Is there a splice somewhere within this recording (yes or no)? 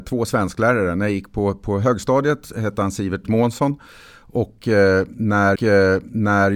yes